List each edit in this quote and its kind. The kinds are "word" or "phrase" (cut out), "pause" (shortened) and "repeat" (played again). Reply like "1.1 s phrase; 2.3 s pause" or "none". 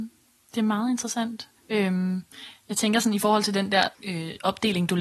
1.6 s pause; 3.9 s pause